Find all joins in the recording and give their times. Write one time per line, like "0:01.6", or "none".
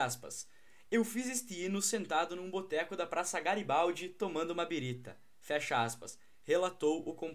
none

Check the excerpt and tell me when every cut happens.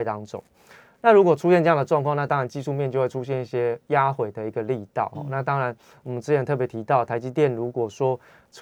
none

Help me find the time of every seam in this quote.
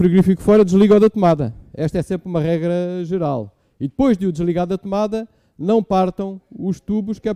none

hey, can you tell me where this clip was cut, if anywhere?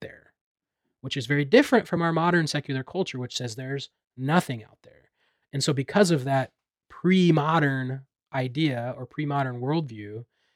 none

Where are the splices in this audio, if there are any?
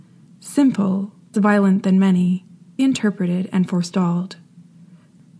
0:01.3
0:02.8

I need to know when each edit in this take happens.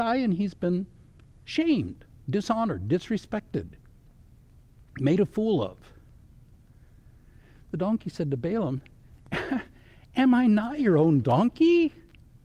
none

